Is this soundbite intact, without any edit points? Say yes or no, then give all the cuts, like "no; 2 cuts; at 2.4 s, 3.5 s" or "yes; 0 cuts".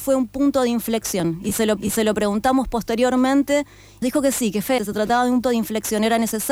no; 4 cuts; at 1.8 s, 4.0 s, 4.8 s, 5.4 s